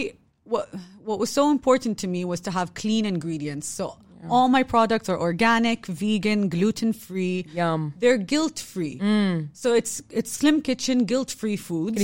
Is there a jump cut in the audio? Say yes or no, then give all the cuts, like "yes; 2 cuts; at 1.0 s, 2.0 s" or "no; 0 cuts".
no; 0 cuts